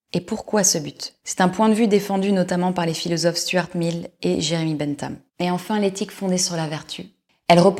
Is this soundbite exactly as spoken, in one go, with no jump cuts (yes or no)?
no